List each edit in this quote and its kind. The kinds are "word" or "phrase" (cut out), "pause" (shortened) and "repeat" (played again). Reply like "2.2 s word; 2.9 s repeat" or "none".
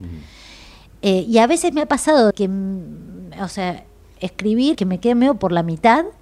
2.3 s word; 4.7 s word